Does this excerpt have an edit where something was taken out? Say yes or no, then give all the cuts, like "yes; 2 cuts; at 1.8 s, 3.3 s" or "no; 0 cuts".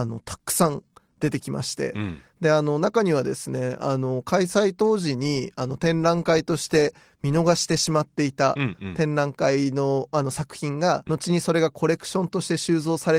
yes; 1 cut; at 11.1 s